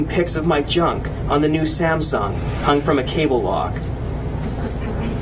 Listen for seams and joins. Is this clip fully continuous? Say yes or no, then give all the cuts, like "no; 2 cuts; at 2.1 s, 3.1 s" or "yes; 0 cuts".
yes; 0 cuts